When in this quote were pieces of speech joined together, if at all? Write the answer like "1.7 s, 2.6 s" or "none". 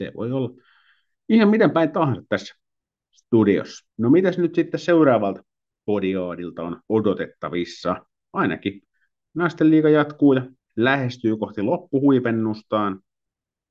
3.9 s, 6.8 s, 10.6 s